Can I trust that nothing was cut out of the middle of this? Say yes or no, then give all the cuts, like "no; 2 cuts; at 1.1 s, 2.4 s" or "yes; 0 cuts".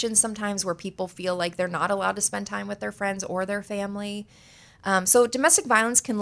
yes; 0 cuts